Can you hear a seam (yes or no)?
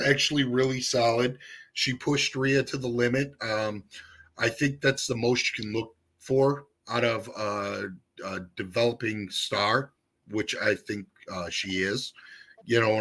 no